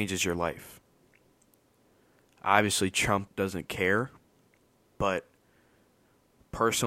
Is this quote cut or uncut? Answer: cut